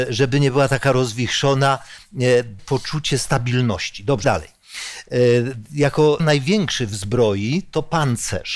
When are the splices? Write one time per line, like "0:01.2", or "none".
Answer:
0:02.6
0:04.2
0:06.2